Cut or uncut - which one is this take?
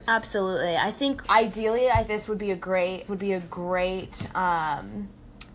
cut